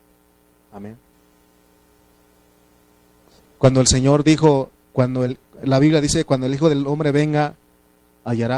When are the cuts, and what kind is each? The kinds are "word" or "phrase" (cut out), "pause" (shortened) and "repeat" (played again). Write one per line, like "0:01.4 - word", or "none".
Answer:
none